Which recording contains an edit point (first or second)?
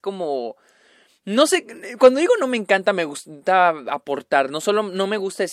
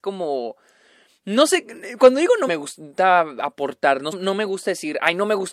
second